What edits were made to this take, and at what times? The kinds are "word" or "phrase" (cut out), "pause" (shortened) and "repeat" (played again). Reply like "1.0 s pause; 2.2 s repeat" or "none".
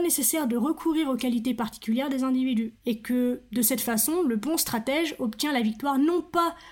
2.8 s pause